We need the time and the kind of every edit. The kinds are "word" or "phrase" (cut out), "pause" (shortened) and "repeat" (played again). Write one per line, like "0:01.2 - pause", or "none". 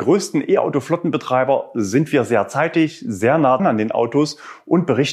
0:03.6 - word